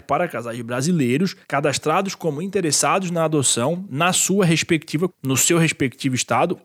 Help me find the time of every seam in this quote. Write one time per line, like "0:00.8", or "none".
0:01.4
0:05.1